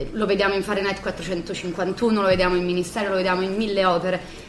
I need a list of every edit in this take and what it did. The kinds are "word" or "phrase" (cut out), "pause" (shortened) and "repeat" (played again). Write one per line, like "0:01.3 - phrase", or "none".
none